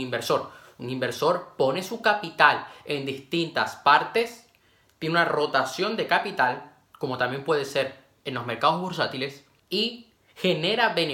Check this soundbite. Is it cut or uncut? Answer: uncut